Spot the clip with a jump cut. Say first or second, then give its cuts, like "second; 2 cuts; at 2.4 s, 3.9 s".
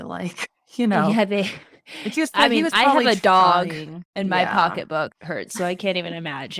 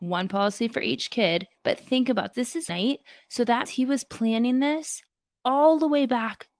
second; 3 cuts; at 2.3 s, 2.7 s, 3.7 s